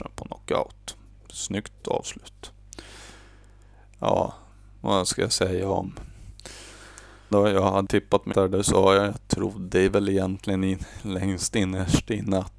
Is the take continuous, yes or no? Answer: no